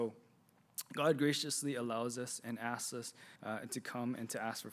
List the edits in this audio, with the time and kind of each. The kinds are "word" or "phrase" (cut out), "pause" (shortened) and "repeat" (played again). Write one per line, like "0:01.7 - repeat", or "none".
0:03.4 - pause